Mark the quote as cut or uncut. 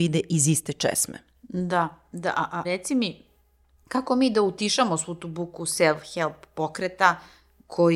cut